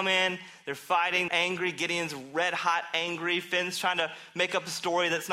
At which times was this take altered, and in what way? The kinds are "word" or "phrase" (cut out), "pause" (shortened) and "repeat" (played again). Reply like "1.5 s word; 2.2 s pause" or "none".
1.3 s word